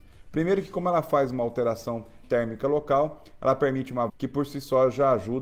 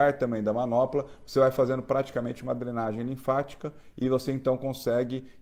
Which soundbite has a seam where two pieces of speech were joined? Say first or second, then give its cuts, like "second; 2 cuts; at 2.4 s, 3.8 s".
first; 2 cuts; at 2.2 s, 4.1 s